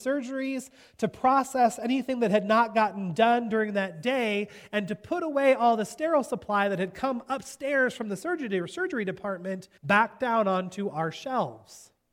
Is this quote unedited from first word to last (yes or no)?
no